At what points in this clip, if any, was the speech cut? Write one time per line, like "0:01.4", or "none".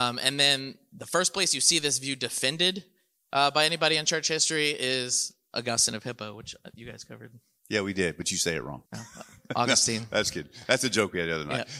0:08.9